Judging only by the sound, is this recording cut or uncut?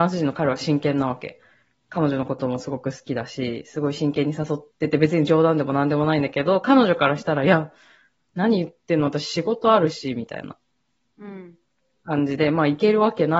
cut